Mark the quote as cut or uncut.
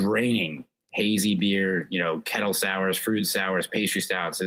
uncut